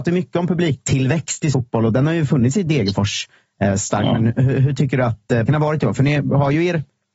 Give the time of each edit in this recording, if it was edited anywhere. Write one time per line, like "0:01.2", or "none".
0:01.5
0:05.5